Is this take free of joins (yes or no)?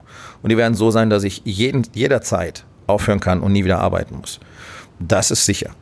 yes